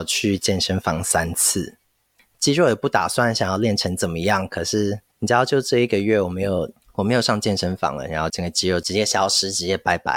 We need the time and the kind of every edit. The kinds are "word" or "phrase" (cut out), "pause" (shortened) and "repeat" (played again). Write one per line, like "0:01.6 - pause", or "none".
none